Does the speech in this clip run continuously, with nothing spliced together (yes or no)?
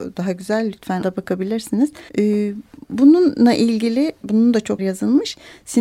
no